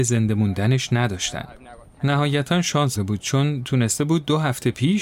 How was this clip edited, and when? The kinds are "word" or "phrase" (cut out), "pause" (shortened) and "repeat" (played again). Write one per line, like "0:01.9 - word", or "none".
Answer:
0:03.0 - word